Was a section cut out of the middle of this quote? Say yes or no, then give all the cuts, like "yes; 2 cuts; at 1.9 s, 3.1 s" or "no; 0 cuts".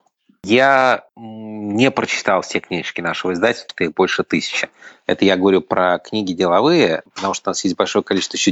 yes; 1 cut; at 3.7 s